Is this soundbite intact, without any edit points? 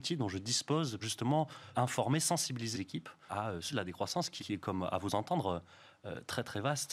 no; 6 cuts; at 1.0 s, 1.7 s, 2.7 s, 3.3 s, 3.7 s, 4.4 s

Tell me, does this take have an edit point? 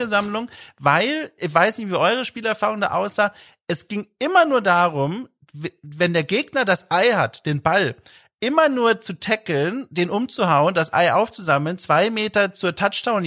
no; 0 cuts

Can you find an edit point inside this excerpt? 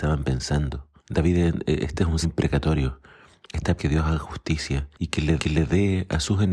yes; 5 cuts; at 1.0 s, 2.2 s, 3.8 s, 4.9 s, 5.4 s

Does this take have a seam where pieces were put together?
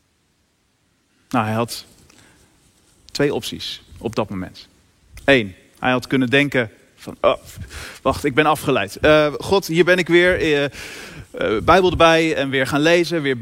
no; 0 cuts

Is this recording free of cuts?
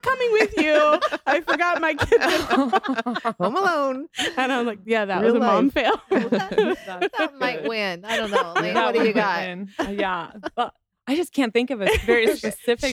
yes; 0 cuts

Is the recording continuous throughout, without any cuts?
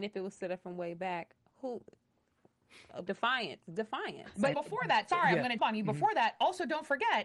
no; 3 cuts; at 3.1 s, 4.5 s, 5.6 s

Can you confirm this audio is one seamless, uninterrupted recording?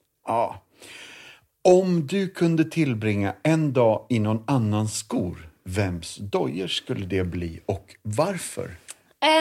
yes; 0 cuts

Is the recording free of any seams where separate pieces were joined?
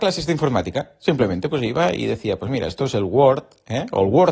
yes; 0 cuts

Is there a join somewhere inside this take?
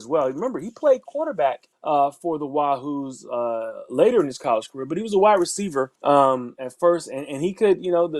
yes; 2 cuts; at 1.7 s, 6.0 s

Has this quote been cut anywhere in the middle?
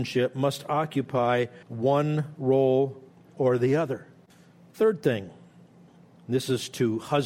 yes; 3 cuts; at 1.6 s, 3.1 s, 4.3 s

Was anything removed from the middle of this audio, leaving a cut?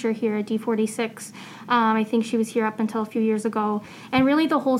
no; 0 cuts

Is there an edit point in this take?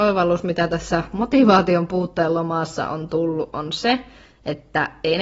no; 0 cuts

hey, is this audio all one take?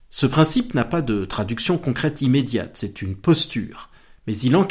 yes; 0 cuts

